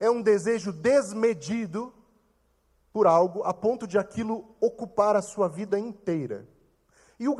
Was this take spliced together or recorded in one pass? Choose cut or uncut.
uncut